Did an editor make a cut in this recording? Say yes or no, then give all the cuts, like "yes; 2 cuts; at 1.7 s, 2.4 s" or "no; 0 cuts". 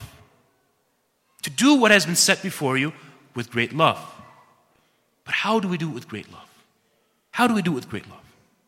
no; 0 cuts